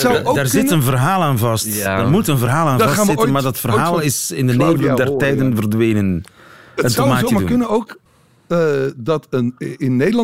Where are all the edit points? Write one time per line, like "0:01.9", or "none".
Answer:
none